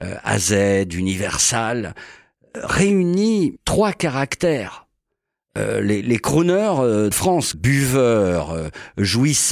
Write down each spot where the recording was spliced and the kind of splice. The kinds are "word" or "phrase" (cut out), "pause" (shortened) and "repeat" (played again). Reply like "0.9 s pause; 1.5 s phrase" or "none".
3.6 s word; 6.0 s word; 7.1 s word; 7.5 s word